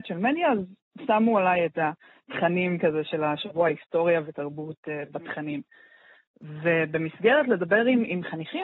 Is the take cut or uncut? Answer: uncut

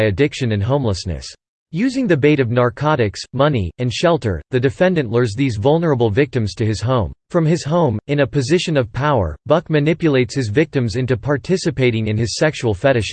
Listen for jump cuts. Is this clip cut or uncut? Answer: cut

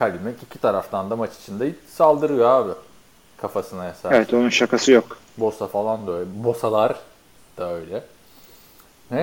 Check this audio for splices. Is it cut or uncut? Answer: uncut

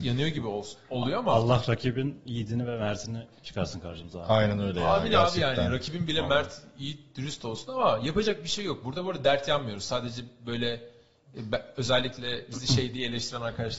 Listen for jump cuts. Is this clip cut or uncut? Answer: uncut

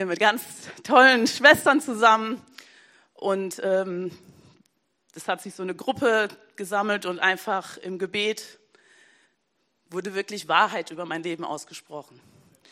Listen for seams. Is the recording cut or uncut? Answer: uncut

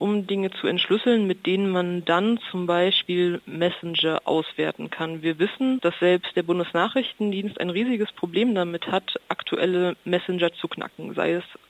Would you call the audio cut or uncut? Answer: uncut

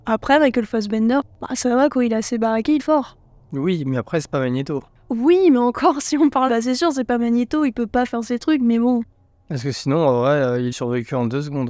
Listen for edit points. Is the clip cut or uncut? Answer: cut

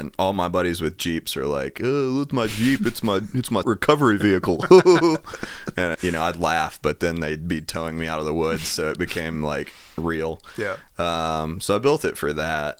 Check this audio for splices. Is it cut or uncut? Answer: cut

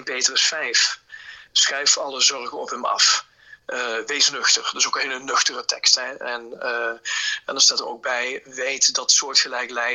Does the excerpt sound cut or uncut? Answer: uncut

